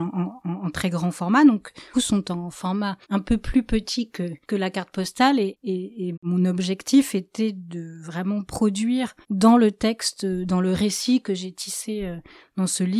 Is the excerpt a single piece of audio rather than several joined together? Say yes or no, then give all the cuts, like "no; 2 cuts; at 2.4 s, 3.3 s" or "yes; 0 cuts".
no; 5 cuts; at 1.9 s, 3.0 s, 4.4 s, 6.1 s, 9.2 s